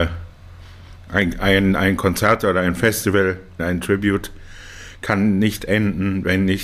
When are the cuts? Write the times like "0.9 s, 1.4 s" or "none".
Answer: 1.1 s, 3.6 s